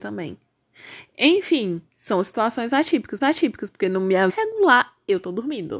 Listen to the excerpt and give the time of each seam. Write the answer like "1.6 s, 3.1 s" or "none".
1.9 s, 3.2 s, 4.3 s